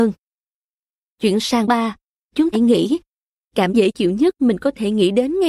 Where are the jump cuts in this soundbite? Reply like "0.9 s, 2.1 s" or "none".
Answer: 1.6 s, 2.5 s, 3.7 s

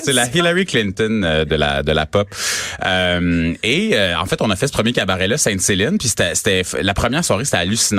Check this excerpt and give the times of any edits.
none

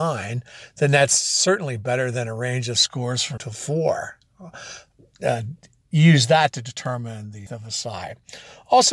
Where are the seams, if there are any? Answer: 3.4 s, 7.5 s

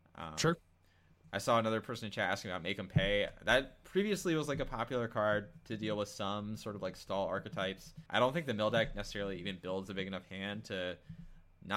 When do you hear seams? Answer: 8.1 s

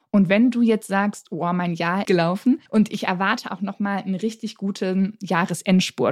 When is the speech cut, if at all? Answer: 2.0 s, 2.7 s

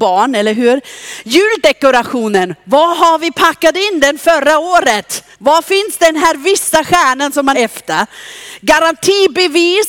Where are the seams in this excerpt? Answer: 5.3 s, 7.5 s

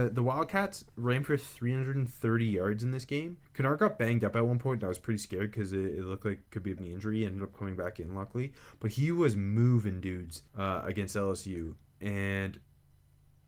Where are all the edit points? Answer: 3.4 s, 6.8 s, 10.5 s

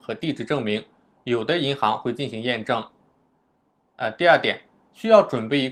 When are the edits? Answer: none

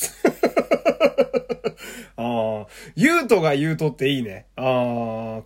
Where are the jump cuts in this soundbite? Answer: none

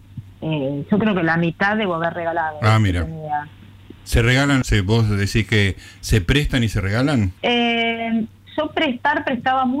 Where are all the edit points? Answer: 4.0 s, 4.6 s, 7.4 s

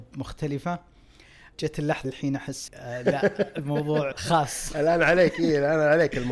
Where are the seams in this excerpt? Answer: 1.5 s, 2.0 s, 2.7 s, 4.1 s

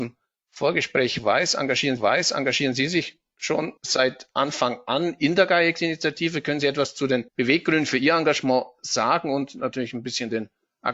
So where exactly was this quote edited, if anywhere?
2.0 s, 3.8 s, 7.3 s

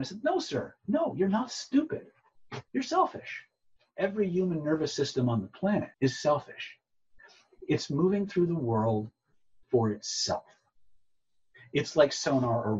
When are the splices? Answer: 2.7 s, 3.8 s, 5.9 s, 9.6 s

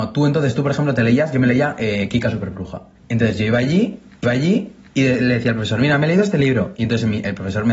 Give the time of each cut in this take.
4.2 s

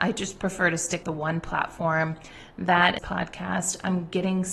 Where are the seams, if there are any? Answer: 1.0 s, 3.0 s

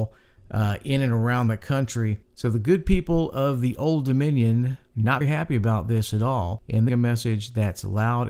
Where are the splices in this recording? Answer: 5.2 s, 6.9 s

